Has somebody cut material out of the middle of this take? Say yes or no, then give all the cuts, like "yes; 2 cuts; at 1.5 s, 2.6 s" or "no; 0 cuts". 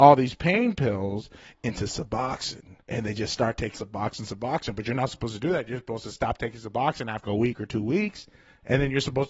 yes; 3 cuts; at 2.8 s, 3.7 s, 7.2 s